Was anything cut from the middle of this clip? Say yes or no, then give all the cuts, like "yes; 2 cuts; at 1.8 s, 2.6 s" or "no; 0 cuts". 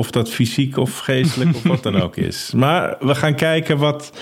no; 0 cuts